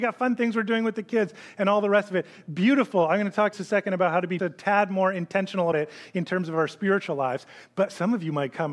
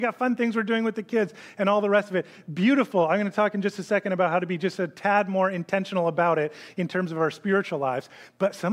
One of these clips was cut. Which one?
first; 3 cuts; at 3.5 s, 4.4 s, 5.7 s

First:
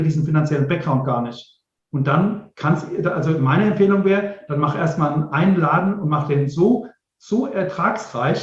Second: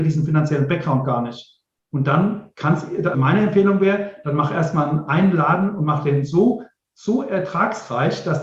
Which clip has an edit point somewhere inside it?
second; 1 cut; at 3.1 s

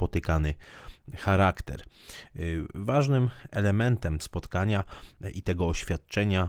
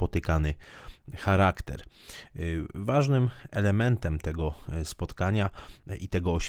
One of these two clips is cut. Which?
first; 1 cut; at 4.2 s

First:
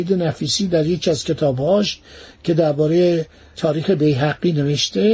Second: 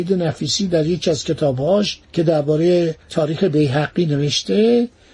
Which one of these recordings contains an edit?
second; 2 cuts; at 2.0 s, 3.0 s

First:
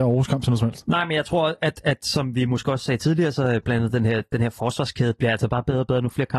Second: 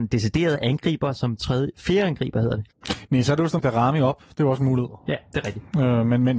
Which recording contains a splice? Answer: second; 1 cut; at 3.6 s

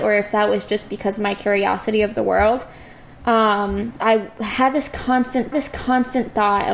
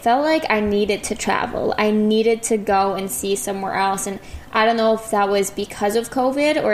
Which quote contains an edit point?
first; 2 cuts; at 4.0 s, 5.5 s

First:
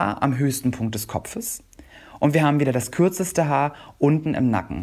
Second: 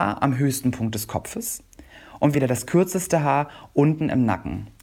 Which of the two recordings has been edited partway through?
second; 1 cut; at 2.3 s

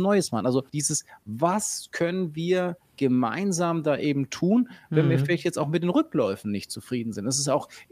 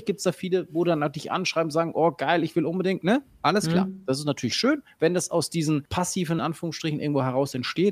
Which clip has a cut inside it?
second; 1 cut; at 6.4 s

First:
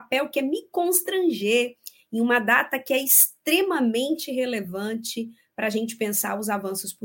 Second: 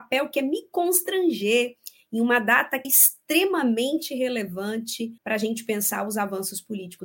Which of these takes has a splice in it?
second; 2 cuts; at 2.8 s, 5.2 s

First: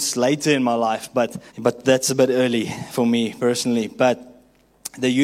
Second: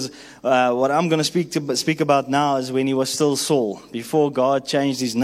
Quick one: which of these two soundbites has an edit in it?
first; 1 cut; at 1.5 s

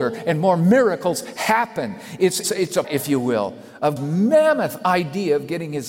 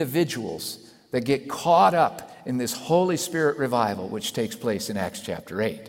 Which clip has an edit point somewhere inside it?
first; 3 cuts; at 2.4 s, 2.8 s, 4.0 s

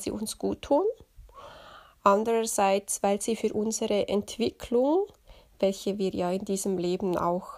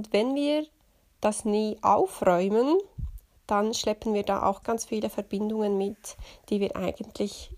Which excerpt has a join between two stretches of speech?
second; 1 cut; at 4.6 s

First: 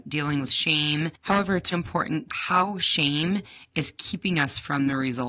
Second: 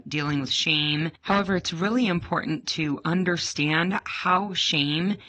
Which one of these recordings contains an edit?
first; 2 cuts; at 1.7 s, 2.3 s

